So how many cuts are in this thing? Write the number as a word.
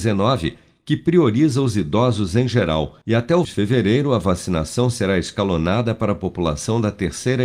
two